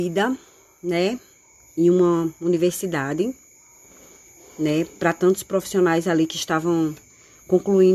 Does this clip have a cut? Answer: no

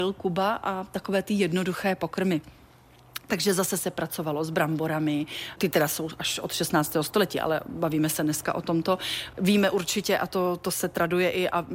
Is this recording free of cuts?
yes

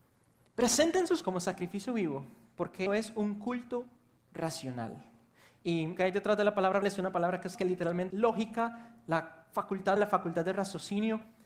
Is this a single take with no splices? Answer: no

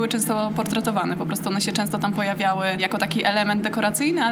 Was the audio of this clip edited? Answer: no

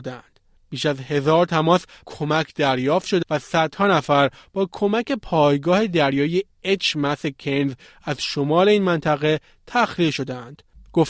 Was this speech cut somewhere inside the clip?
yes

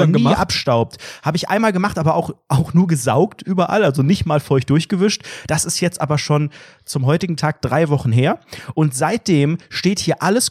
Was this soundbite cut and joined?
no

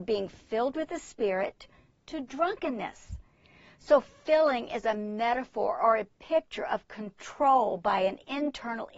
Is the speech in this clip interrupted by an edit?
no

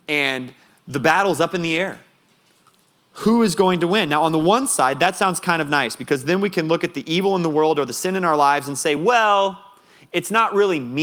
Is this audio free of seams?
yes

